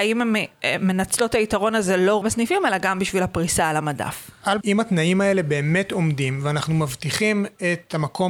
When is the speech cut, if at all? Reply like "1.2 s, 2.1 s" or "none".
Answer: 2.2 s, 4.6 s